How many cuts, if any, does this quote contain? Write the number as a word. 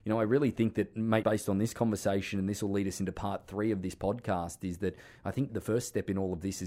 two